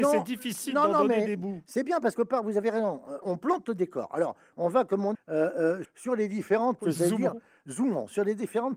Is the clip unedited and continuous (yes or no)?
no